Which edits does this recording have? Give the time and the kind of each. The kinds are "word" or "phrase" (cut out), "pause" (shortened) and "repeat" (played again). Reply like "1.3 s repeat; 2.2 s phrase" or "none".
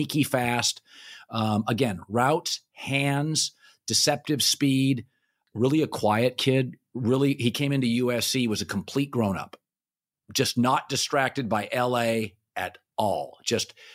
none